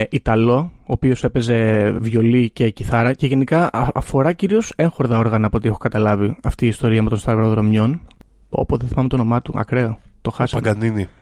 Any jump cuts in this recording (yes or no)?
no